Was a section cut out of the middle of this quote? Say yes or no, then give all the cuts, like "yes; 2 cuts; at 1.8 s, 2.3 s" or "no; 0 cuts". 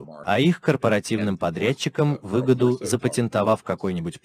no; 0 cuts